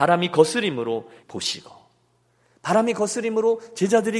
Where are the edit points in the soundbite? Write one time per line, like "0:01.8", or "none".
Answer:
0:01.2